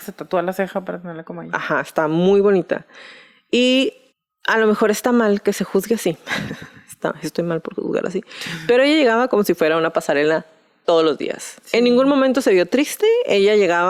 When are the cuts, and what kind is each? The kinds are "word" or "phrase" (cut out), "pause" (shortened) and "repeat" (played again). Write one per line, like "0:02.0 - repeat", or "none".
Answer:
0:04.1 - pause